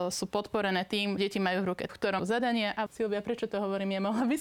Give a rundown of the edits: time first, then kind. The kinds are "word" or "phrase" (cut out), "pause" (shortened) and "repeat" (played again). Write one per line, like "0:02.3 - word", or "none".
0:01.2 - word
0:01.9 - word
0:02.2 - word
0:02.9 - word